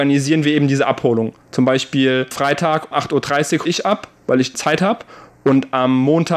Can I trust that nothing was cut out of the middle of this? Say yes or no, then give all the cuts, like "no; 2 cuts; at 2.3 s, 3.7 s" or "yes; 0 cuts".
no; 4 cuts; at 2.3 s, 2.9 s, 3.7 s, 4.5 s